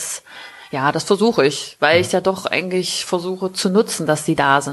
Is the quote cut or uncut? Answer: uncut